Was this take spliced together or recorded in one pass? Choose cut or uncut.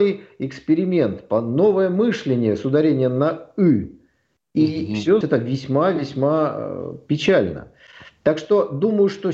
cut